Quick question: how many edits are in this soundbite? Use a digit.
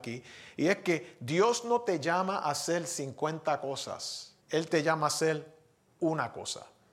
1